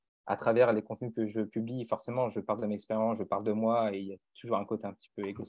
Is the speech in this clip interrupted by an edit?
no; 0 cuts

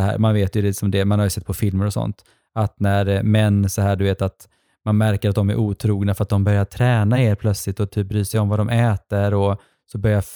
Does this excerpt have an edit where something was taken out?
no; 0 cuts

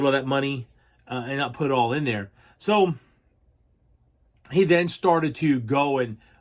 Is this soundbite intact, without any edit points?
yes; 0 cuts

